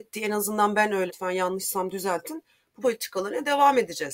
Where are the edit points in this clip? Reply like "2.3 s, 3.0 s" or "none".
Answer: 1.1 s, 2.8 s